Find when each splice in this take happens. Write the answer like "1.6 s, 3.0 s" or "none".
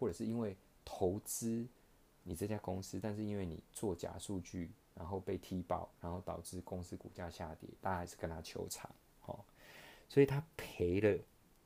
none